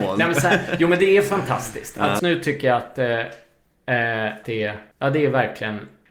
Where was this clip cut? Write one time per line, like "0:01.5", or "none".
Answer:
0:02.2
0:04.4
0:04.9

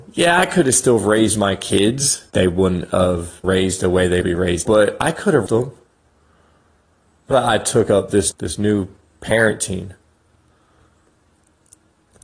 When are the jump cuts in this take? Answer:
0:02.3
0:03.4
0:04.2
0:04.7
0:05.5
0:07.3
0:08.3

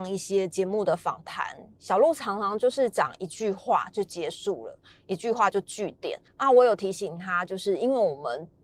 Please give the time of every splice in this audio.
0:06.3

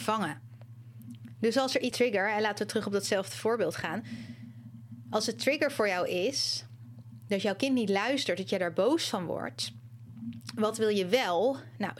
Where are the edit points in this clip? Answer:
0:01.9

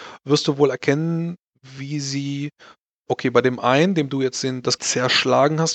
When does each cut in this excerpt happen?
0:04.8

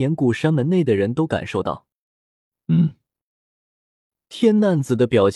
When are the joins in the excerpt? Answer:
none

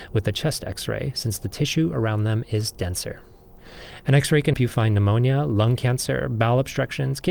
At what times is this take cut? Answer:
0:04.5

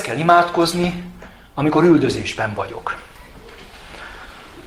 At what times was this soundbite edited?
none

